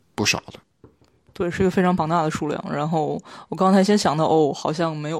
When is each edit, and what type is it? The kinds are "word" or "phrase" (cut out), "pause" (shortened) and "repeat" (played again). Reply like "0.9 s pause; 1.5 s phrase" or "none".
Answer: none